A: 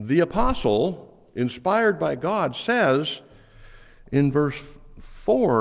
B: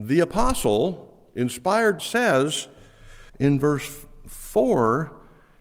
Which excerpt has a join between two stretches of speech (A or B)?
B